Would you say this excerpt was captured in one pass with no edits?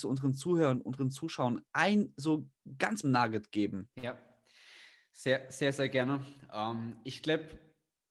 no; 3 cuts; at 1.7 s, 3.0 s, 3.9 s

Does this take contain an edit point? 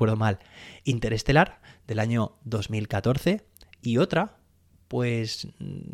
no; 0 cuts

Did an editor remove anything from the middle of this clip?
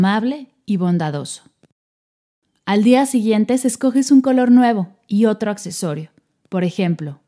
no; 0 cuts

